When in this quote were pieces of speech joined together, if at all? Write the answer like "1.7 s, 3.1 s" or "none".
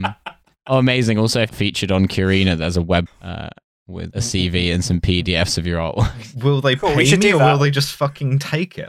1.5 s, 3.1 s, 4.1 s